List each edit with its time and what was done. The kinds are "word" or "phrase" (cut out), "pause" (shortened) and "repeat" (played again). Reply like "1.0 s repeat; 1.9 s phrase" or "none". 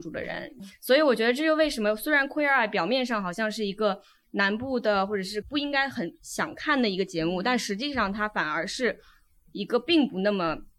5.4 s word